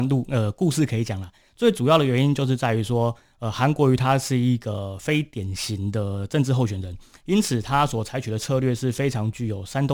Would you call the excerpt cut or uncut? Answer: uncut